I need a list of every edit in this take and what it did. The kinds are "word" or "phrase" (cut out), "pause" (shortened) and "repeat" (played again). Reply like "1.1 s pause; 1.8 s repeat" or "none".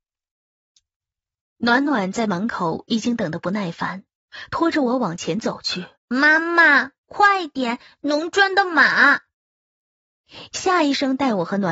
6.0 s pause